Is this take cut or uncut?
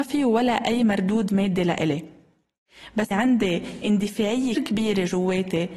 cut